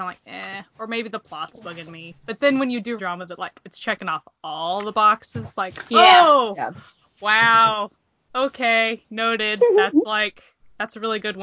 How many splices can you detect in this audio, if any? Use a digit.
1